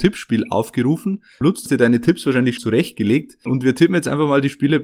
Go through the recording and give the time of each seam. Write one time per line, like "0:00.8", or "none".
0:01.7
0:02.6